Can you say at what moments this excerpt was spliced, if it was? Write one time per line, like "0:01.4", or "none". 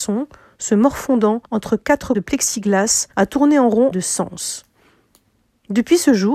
0:01.4
0:02.1
0:03.1
0:03.9